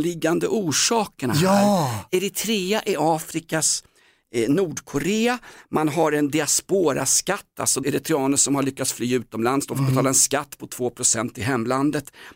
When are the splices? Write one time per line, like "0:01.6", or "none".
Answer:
0:07.8